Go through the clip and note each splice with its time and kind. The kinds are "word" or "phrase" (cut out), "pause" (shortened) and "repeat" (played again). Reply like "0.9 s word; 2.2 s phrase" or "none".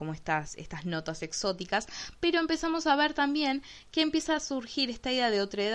none